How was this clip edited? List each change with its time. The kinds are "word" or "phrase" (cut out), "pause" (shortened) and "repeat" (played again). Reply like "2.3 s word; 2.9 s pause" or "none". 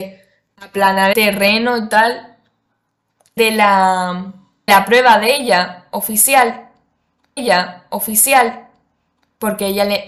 1.1 s word; 3.4 s word; 4.7 s word; 7.4 s repeat